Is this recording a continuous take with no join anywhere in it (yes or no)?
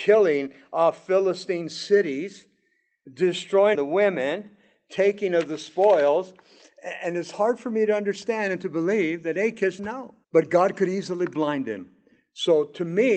no